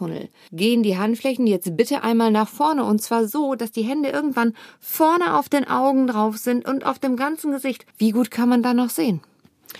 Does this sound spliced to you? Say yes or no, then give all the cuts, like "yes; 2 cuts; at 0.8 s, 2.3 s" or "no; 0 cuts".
yes; 1 cut; at 7.9 s